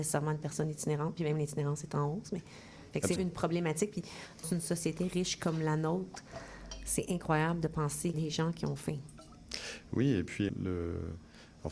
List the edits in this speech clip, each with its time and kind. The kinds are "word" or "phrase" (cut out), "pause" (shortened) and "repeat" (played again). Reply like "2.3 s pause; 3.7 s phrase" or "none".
3.2 s word; 4.4 s word; 8.1 s word; 10.5 s word